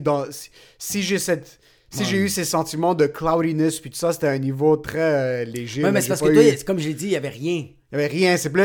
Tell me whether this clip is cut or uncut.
uncut